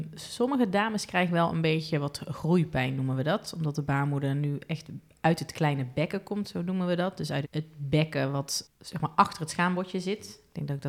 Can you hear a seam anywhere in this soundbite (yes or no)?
yes